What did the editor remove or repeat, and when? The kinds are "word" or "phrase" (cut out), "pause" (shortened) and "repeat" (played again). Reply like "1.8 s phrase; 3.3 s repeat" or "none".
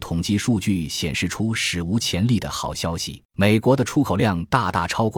3.3 s pause

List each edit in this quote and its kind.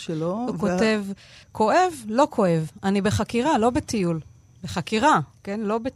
1.4 s pause

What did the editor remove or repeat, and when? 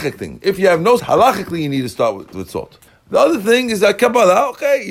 1.0 s word; 2.3 s word; 2.9 s pause

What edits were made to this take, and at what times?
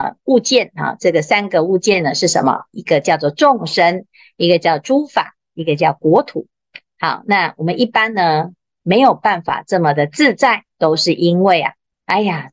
10.7 s pause

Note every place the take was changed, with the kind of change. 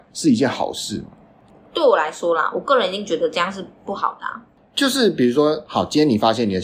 none

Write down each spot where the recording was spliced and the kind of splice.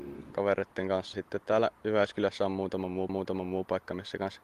1.1 s word; 3.1 s repeat

